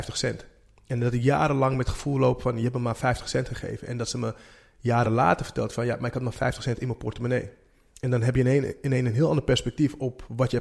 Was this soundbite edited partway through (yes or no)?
no